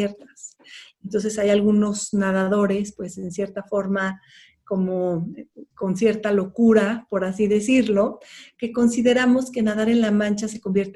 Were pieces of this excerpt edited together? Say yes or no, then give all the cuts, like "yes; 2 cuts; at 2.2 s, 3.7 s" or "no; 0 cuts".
no; 0 cuts